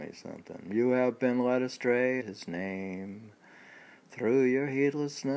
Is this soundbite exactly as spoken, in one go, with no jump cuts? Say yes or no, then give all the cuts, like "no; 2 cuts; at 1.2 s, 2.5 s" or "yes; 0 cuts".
no; 1 cut; at 2.2 s